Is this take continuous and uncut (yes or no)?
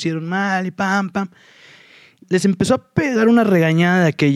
no